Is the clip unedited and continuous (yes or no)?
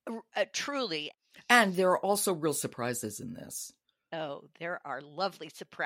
yes